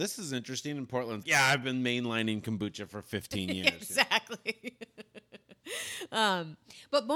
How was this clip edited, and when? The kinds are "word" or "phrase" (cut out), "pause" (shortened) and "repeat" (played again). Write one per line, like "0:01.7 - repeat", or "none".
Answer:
0:01.2 - word

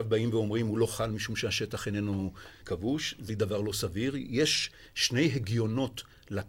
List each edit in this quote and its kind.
0:02.6 - word
0:03.3 - word

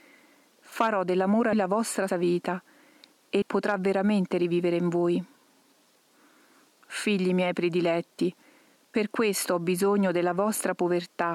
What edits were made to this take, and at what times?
0:01.5 - word
0:02.1 - word
0:03.4 - word

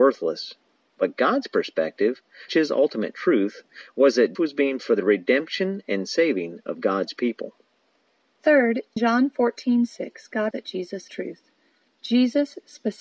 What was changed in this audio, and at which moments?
0:02.5 - word
0:04.3 - word
0:04.8 - word
0:09.0 - word
0:10.5 - word
0:11.1 - word

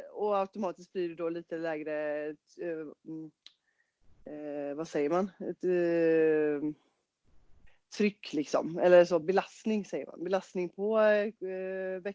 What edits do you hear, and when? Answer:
none

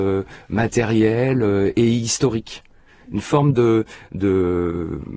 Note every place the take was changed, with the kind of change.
none

